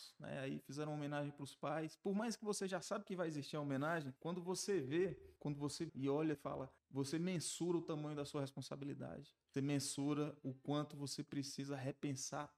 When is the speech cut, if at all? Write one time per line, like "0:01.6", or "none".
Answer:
0:04.2
0:05.4
0:05.9
0:06.3
0:06.8
0:09.5